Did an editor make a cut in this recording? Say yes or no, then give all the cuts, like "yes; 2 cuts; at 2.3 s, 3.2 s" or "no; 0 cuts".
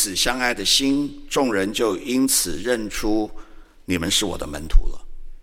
no; 0 cuts